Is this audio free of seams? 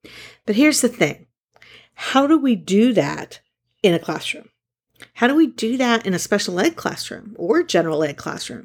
yes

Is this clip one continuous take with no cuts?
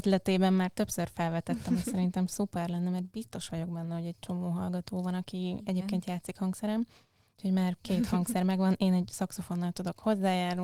yes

